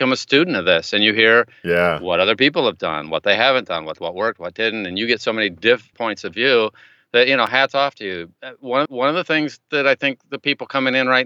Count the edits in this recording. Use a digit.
3